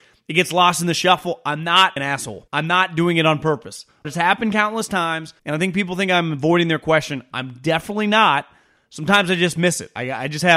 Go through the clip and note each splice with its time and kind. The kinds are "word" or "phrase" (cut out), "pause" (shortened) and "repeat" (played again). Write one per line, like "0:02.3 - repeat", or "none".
0:02.0 - phrase
0:02.5 - pause
0:04.0 - word
0:05.4 - pause